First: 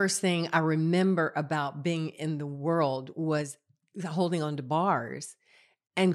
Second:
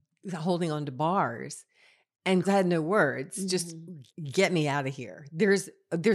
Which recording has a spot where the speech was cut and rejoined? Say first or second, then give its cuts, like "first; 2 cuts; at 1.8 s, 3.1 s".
second; 2 cuts; at 2.4 s, 4.1 s